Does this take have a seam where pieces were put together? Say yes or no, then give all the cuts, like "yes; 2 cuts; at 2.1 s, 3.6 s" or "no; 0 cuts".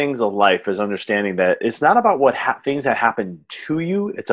no; 0 cuts